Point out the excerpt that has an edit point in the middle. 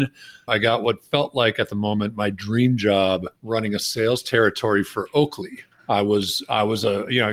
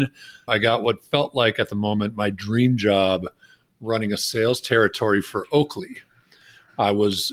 first; 2 cuts; at 3.4 s, 5.7 s

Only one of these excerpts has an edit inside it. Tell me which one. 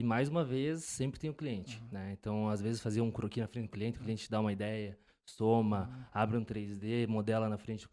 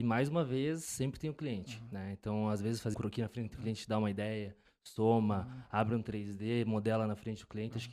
second; 2 cuts; at 2.9 s, 3.5 s

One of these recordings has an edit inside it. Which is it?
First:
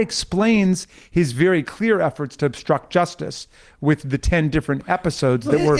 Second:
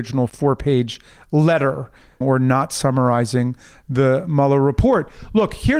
second; 1 cut; at 2.2 s

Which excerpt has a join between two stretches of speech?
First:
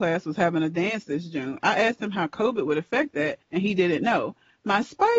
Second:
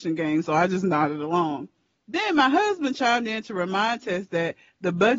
first; 1 cut; at 3.4 s

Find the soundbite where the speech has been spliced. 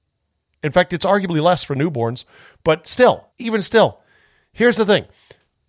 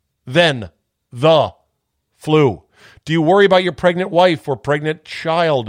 first; 1 cut; at 3.3 s

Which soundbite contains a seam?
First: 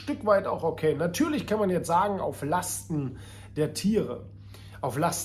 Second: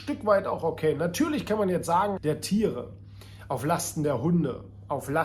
second; 1 cut; at 2.2 s

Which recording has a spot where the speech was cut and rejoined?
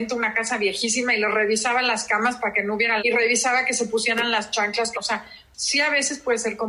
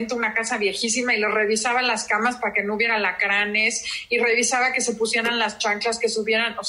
first; 2 cuts; at 3.0 s, 4.9 s

